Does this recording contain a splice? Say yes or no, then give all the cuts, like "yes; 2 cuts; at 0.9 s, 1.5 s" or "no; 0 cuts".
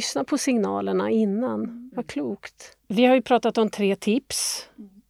yes; 1 cut; at 2.8 s